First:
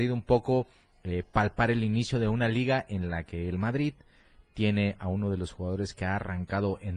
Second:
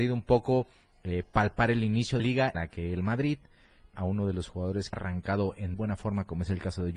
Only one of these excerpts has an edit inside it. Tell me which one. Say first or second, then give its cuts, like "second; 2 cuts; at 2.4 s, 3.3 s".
second; 5 cuts; at 2.2 s, 2.5 s, 3.9 s, 4.9 s, 5.7 s